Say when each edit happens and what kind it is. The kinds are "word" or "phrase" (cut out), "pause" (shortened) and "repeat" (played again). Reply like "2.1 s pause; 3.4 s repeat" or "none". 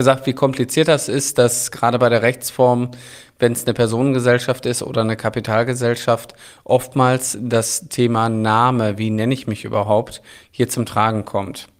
none